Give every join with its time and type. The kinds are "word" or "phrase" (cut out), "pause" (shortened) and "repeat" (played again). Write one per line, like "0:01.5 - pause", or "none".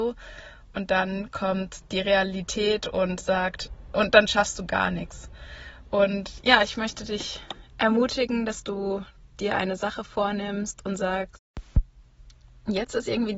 none